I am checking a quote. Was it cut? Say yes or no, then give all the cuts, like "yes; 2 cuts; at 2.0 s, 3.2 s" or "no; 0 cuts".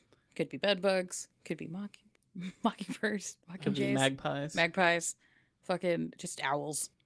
no; 0 cuts